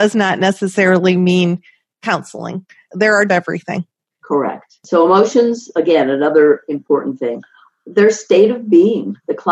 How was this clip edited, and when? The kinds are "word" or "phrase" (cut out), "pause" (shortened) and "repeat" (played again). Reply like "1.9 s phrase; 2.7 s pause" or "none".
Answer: 3.3 s phrase